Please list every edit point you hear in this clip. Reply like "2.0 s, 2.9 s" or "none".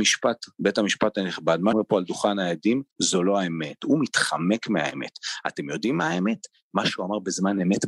1.7 s, 2.9 s

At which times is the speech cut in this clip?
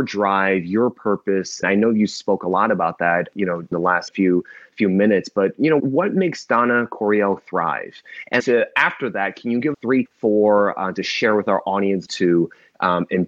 1.6 s, 3.3 s, 3.7 s, 4.1 s, 5.8 s, 8.4 s, 9.7 s, 10.0 s, 12.1 s

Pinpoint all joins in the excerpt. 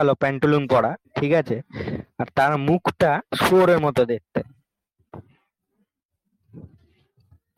1.0 s

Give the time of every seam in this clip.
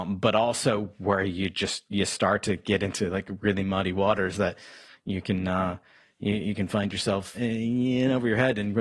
7.3 s

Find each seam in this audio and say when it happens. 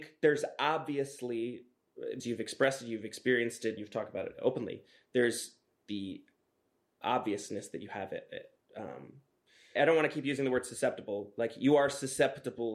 2.2 s, 3.8 s, 7.0 s, 9.8 s

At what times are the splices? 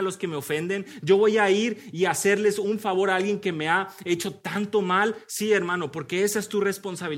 none

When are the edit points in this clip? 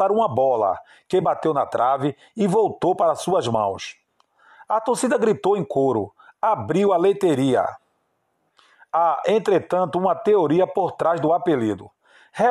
none

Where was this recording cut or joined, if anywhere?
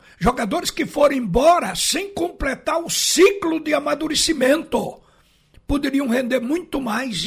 none

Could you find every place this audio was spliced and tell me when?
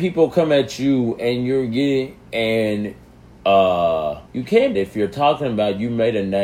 4.3 s, 4.7 s

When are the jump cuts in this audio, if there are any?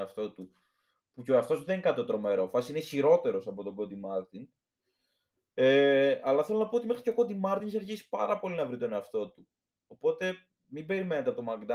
none

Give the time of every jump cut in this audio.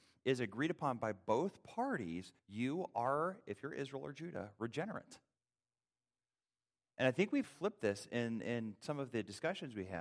2.4 s, 7.4 s

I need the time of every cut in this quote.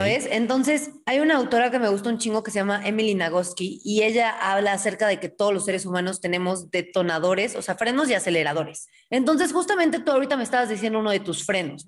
none

